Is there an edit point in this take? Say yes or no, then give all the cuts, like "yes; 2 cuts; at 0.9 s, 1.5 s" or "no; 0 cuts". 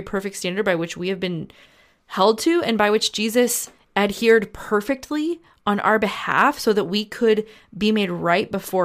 no; 0 cuts